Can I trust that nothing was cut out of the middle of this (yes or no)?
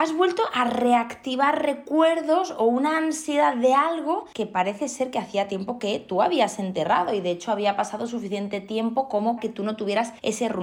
no